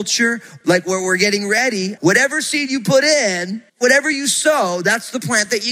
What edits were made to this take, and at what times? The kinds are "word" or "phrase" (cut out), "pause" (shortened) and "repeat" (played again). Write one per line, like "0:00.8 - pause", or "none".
0:03.7 - pause